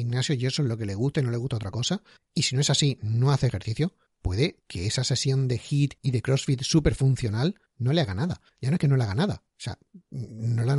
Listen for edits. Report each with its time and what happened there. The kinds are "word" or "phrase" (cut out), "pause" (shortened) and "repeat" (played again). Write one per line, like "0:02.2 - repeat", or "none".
none